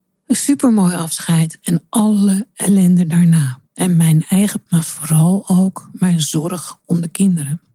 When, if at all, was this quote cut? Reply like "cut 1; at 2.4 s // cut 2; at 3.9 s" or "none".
cut 1; at 3.7 s // cut 2; at 4.7 s